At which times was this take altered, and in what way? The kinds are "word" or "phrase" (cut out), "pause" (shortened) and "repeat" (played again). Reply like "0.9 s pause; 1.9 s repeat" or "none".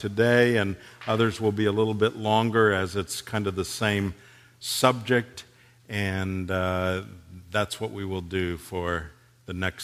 none